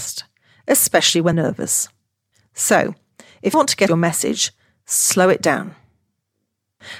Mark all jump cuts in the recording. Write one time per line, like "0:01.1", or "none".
0:01.3
0:03.5
0:03.9